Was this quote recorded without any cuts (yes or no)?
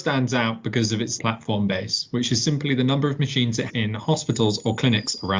no